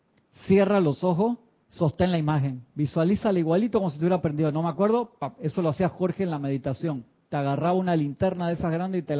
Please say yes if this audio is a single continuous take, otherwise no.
yes